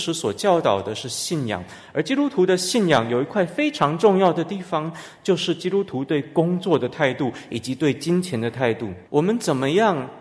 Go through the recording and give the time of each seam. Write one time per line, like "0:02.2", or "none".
0:09.1